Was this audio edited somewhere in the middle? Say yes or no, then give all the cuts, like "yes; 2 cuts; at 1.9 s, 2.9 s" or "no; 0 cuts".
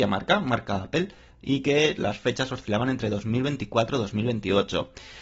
no; 0 cuts